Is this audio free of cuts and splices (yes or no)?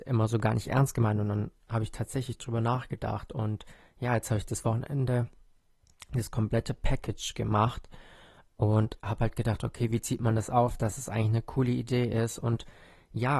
yes